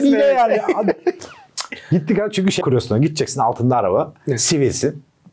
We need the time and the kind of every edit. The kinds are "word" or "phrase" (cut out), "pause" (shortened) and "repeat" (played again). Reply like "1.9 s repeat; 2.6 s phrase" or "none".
2.6 s word